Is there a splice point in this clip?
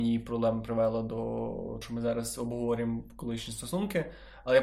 yes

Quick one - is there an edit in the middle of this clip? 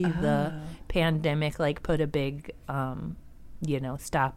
no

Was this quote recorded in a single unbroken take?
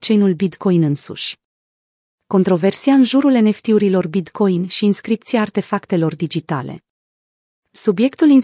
yes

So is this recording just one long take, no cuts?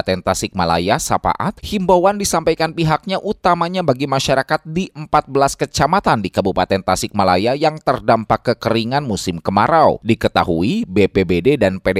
yes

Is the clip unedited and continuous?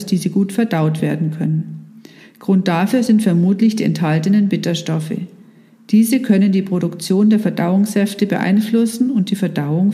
yes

